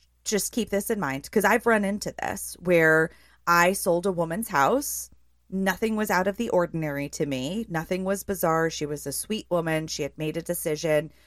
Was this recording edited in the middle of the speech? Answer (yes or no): no